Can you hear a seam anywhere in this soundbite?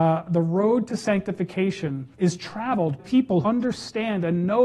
yes; 3 cuts; at 2.1 s, 3.0 s, 3.4 s

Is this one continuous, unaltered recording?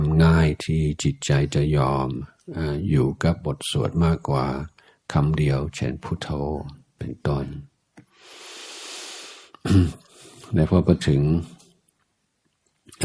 yes; 0 cuts

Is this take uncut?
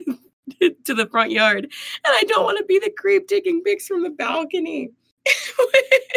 yes; 0 cuts

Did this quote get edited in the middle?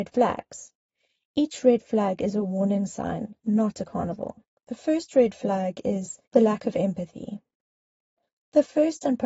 yes; 3 cuts; at 3.4 s, 4.5 s, 6.2 s

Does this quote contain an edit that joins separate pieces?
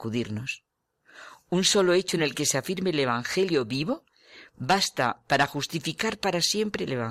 no; 0 cuts

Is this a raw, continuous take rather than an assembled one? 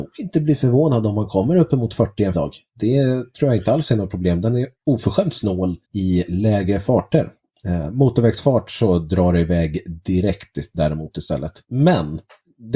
no; 4 cuts; at 2.3 s, 4.7 s, 5.8 s, 11.6 s

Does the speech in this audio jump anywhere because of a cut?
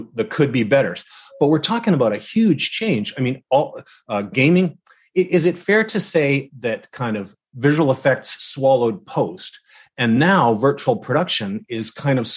no; 0 cuts

